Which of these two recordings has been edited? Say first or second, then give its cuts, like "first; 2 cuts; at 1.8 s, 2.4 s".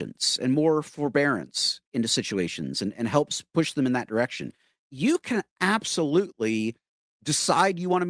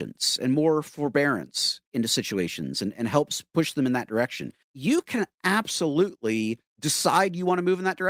second; 2 cuts; at 4.6 s, 6.7 s